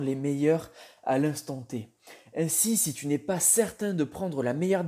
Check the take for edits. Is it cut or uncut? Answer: uncut